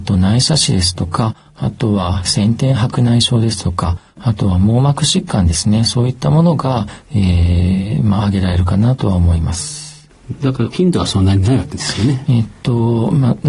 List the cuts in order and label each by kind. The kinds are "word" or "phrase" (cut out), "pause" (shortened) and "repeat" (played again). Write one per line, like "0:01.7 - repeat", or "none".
0:10.7 - phrase